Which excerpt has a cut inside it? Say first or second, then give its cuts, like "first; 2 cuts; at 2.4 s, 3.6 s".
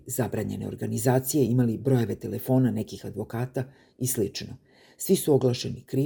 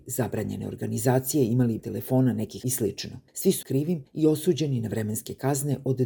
second; 5 cuts; at 1.8 s, 2.6 s, 3.3 s, 3.6 s, 4.1 s